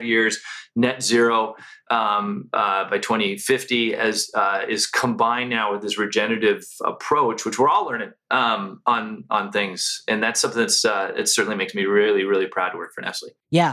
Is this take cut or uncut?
uncut